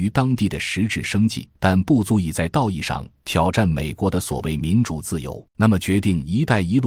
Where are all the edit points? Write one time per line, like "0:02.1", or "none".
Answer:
0:01.6
0:05.5